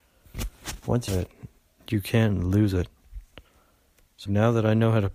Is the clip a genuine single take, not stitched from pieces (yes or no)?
no